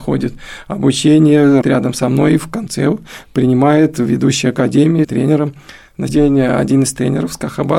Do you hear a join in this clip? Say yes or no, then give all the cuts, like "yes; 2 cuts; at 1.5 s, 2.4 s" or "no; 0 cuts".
yes; 3 cuts; at 1.6 s, 5.0 s, 6.1 s